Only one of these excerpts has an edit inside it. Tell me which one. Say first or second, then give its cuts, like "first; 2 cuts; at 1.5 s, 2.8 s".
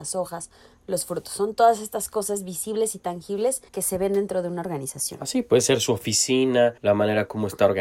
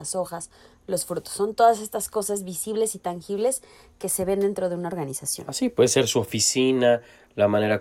first; 2 cuts; at 3.7 s, 6.8 s